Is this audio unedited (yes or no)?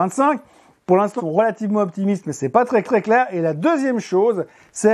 no